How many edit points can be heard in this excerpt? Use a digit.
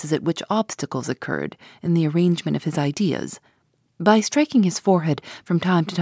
0